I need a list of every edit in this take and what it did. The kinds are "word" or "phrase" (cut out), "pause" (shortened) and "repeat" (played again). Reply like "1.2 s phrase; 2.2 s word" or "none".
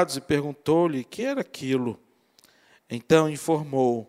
none